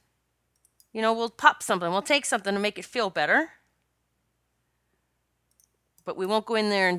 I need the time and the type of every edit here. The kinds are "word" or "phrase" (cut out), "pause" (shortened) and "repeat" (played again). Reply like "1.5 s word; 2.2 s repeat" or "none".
none